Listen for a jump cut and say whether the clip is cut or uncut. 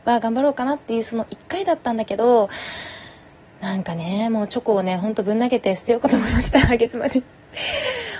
uncut